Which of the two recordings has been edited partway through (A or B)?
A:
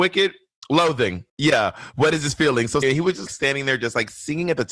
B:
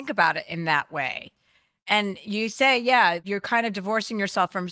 A